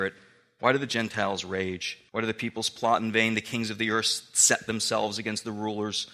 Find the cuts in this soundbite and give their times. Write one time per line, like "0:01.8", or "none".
0:02.1

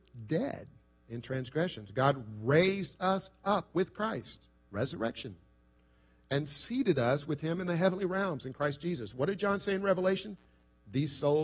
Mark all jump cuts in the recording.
none

